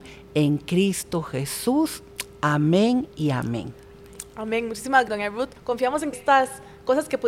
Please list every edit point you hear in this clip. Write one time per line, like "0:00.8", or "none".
0:03.1
0:05.1
0:05.6
0:06.1